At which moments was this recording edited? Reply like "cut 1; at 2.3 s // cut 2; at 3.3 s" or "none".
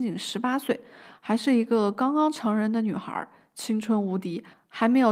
none